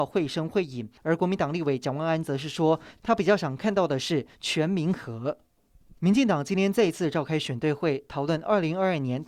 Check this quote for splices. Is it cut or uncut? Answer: cut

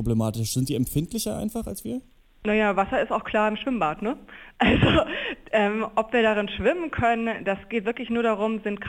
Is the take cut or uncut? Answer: uncut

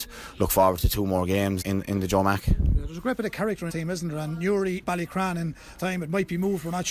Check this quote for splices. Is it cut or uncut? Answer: cut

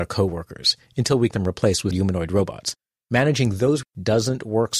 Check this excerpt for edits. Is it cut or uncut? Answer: cut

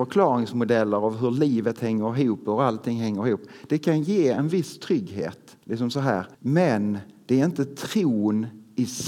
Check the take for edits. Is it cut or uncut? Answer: cut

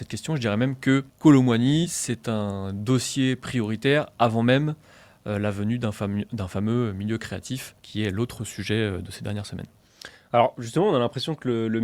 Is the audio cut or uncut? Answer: cut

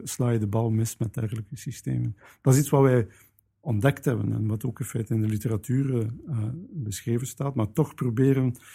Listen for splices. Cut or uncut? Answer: uncut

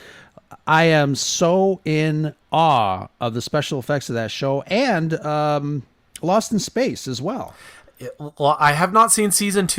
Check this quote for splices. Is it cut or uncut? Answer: uncut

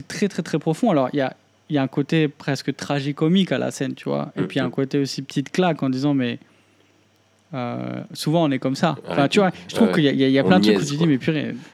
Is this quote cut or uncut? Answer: uncut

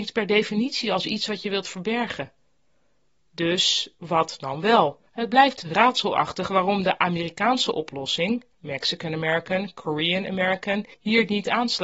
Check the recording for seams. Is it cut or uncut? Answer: cut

